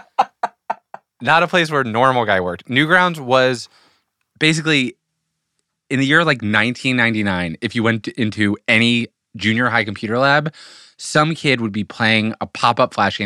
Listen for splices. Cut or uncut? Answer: uncut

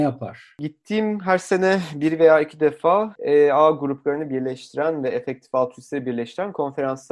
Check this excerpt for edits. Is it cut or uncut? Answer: uncut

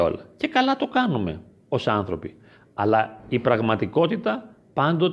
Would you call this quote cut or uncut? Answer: uncut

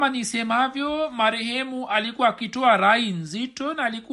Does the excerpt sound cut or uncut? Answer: uncut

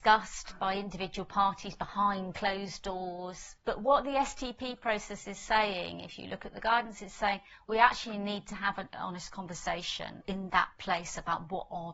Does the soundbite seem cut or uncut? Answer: uncut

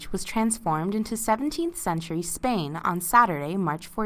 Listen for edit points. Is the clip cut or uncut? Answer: uncut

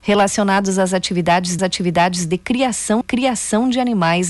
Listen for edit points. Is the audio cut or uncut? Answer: cut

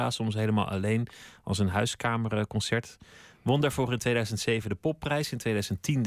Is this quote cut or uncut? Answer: uncut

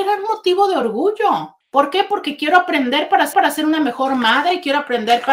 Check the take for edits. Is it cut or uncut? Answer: cut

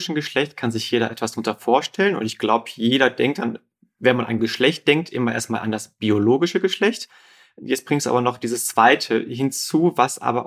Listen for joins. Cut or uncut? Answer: uncut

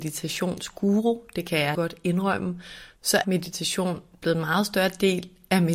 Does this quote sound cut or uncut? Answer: cut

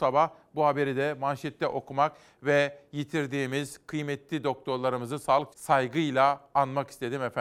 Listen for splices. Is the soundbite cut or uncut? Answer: cut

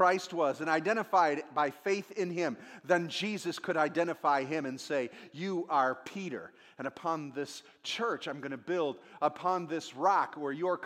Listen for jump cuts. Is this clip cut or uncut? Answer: uncut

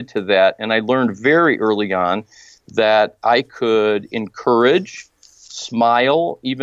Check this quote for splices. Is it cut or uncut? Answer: uncut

